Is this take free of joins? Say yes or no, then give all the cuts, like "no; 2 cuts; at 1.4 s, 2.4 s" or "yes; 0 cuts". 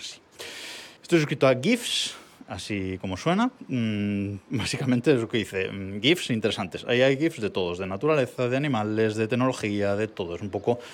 no; 1 cut; at 1.0 s